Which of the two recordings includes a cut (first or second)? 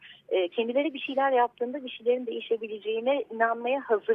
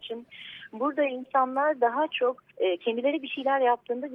second